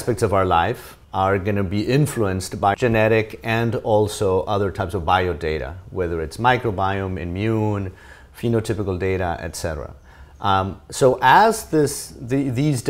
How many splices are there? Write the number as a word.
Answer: two